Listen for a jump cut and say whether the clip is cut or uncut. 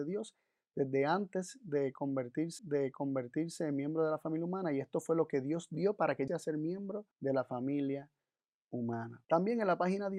cut